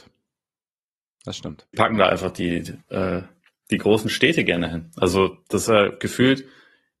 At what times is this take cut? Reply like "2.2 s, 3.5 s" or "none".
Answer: 1.7 s, 2.8 s